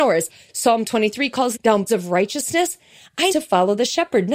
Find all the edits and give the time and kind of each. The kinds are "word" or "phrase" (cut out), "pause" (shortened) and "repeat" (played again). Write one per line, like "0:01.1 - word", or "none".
0:01.5 - word
0:01.9 - word
0:03.3 - word